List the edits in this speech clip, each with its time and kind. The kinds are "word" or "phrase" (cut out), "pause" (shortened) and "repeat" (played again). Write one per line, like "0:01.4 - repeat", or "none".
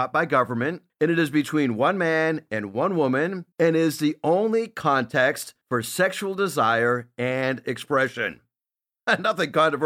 0:03.5 - pause

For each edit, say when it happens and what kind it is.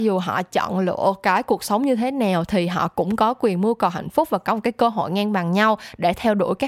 none

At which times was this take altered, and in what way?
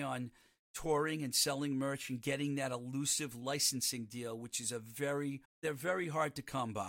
0:05.4 - pause

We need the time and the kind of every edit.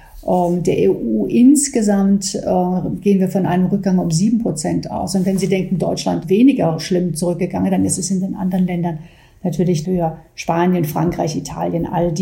0:06.2 - word
0:09.8 - word

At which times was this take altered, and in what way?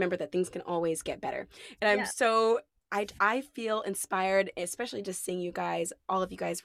none

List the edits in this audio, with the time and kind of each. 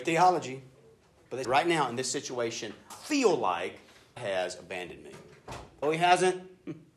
0:01.4 - word
0:02.9 - word
0:04.2 - word
0:05.8 - word

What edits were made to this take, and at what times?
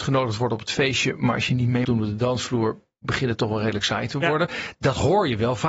0:01.8 - word

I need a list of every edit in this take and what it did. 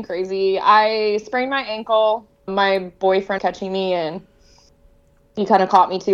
0:02.5 - word
0:03.4 - word

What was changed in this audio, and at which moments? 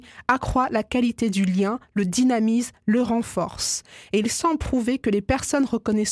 none

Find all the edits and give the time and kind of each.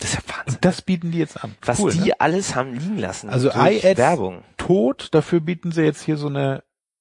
none

